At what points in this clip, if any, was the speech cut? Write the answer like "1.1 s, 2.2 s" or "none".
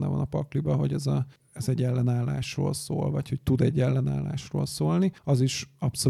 1.3 s, 5.2 s